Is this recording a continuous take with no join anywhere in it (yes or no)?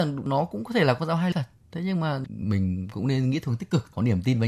no